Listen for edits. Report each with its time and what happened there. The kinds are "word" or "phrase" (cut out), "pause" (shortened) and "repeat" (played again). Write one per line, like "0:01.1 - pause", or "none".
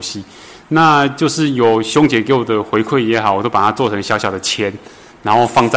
none